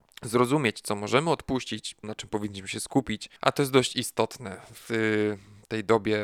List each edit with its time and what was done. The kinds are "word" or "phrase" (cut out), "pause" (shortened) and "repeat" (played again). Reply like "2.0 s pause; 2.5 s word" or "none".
2.0 s word; 3.4 s pause

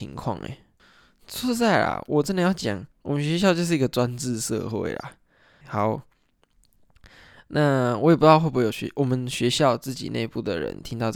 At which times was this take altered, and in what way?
2.9 s pause; 5.6 s word

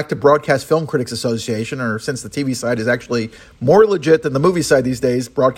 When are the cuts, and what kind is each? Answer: none

